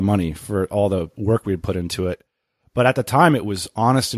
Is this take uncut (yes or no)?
yes